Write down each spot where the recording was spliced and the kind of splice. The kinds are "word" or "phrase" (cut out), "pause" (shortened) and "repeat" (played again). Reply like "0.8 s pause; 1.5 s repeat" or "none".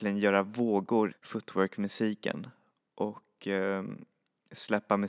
1.1 s word